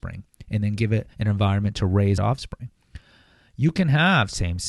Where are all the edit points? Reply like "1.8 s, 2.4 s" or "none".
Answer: 1.1 s, 2.2 s